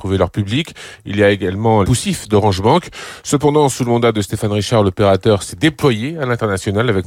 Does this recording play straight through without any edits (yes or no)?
no